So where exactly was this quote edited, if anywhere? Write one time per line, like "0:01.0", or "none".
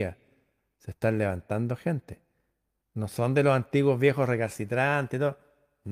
none